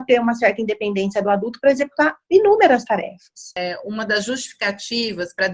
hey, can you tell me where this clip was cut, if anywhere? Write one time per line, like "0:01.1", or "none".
none